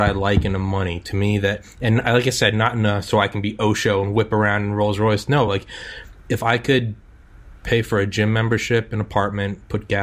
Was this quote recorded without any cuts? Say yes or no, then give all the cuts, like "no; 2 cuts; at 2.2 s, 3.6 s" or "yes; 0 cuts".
yes; 0 cuts